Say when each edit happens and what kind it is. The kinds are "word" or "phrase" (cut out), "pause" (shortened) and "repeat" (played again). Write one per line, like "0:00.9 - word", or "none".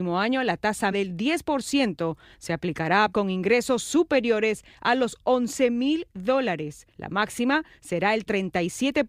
0:00.9 - word
0:03.1 - word
0:06.9 - pause